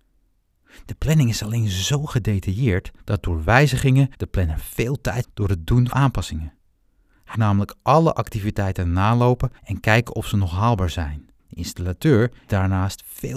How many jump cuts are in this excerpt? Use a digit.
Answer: 8